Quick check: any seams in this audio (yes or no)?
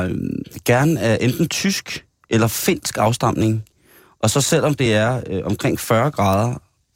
no